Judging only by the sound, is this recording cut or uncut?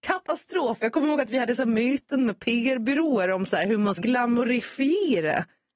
cut